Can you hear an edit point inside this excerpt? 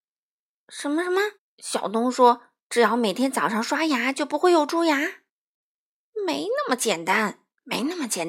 yes; 2 cuts; at 1.4 s, 5.3 s

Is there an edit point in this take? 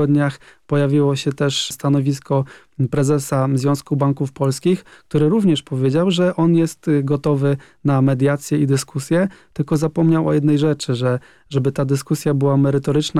no; 0 cuts

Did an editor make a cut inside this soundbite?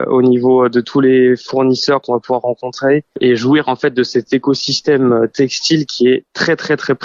no; 0 cuts

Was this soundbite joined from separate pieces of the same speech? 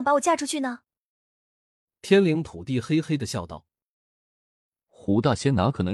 no; 0 cuts

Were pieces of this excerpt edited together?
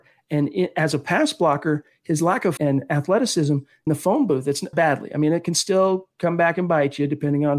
yes; 3 cuts; at 2.6 s, 3.9 s, 4.7 s

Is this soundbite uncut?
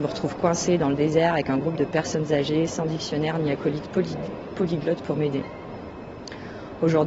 yes; 0 cuts

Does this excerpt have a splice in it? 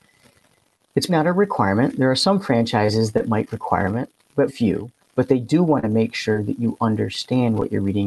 yes; 2 cuts; at 1.1 s, 4.5 s

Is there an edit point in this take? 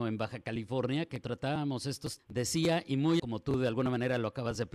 yes; 3 cuts; at 1.2 s, 2.2 s, 3.2 s

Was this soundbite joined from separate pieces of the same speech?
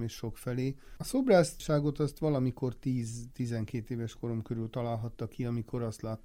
no; 0 cuts

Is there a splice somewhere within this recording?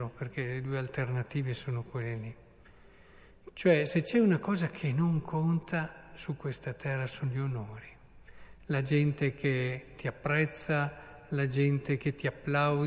no; 0 cuts

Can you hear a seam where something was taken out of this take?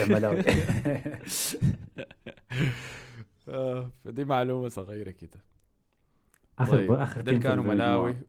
no; 0 cuts

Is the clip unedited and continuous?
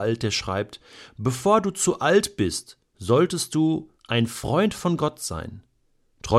no; 2 cuts; at 2.9 s, 4.0 s

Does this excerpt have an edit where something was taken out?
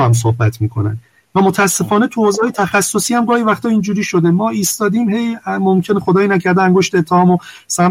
no; 0 cuts

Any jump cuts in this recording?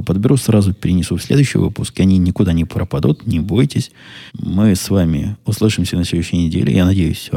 yes; 1 cut; at 4.3 s

